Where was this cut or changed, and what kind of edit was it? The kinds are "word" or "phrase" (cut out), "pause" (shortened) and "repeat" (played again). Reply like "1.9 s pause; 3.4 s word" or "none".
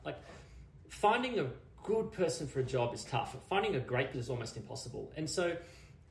4.1 s word